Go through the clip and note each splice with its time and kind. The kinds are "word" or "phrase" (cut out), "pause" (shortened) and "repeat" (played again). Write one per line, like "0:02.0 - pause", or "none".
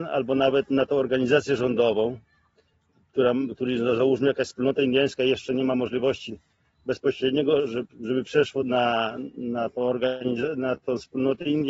none